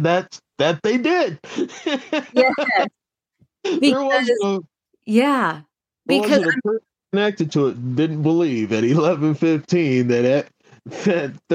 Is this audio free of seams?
yes; 0 cuts

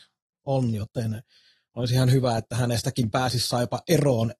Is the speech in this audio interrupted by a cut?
no; 0 cuts

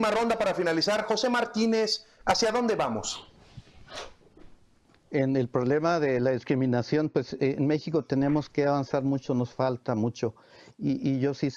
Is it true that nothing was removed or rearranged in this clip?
yes; 0 cuts

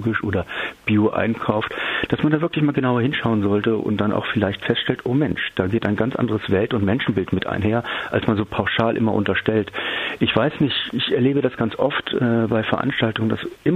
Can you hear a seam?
no; 0 cuts

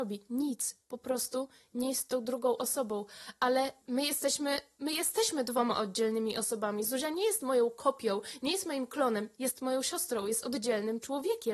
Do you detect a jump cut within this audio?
no; 0 cuts

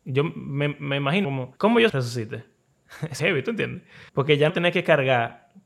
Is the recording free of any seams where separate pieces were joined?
no; 6 cuts; at 1.2 s, 1.6 s, 1.9 s, 3.2 s, 4.1 s, 4.5 s

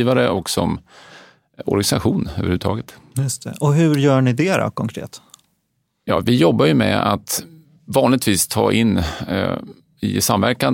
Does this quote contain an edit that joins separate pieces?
no; 0 cuts

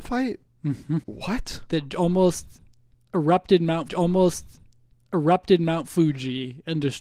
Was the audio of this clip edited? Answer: yes; 2 cuts; at 1.0 s, 3.9 s

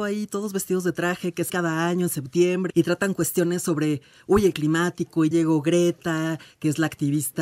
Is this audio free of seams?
no; 4 cuts; at 1.5 s, 2.7 s, 4.5 s, 5.3 s

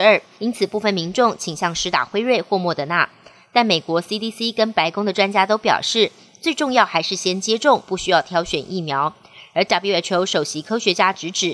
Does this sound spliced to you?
no; 0 cuts

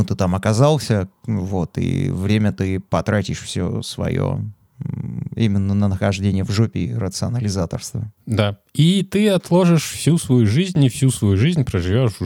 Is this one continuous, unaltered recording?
yes; 0 cuts

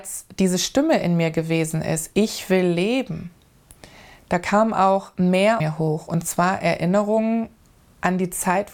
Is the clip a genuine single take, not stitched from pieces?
no; 1 cut; at 5.6 s

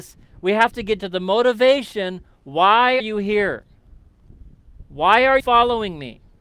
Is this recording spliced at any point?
yes; 3 cuts; at 1.0 s, 3.0 s, 5.4 s

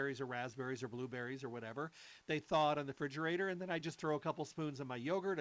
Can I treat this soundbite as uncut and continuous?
yes; 0 cuts

